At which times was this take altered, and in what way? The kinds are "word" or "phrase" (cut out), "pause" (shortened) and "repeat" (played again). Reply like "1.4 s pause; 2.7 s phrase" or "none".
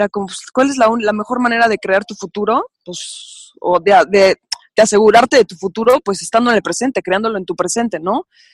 2.7 s pause